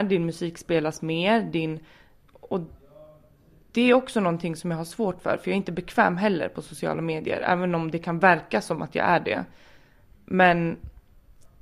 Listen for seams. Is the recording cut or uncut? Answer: uncut